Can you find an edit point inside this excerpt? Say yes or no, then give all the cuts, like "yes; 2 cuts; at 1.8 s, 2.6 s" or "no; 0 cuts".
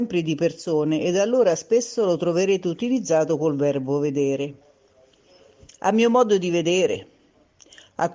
no; 0 cuts